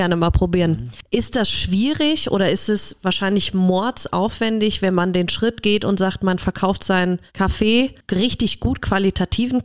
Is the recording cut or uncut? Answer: cut